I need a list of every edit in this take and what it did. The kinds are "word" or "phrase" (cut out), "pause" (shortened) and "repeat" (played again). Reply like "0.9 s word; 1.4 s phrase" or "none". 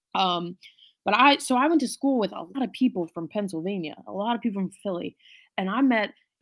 2.5 s word